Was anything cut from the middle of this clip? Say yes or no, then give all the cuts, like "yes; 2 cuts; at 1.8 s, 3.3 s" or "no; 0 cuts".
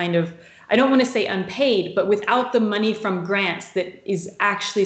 no; 0 cuts